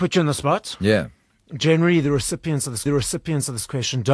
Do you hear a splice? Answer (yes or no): yes